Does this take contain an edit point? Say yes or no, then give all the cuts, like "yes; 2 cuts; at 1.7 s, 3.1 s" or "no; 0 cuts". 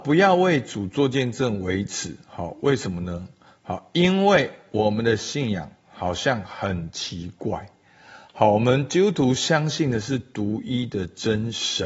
no; 0 cuts